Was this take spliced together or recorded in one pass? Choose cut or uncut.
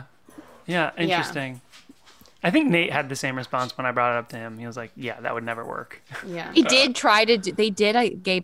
uncut